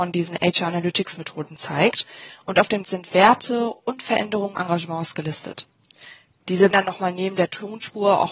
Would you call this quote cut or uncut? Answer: cut